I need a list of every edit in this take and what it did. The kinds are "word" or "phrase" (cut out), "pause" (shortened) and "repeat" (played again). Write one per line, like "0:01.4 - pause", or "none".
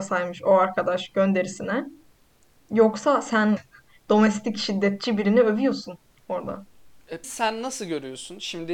0:03.6 - word
0:07.2 - word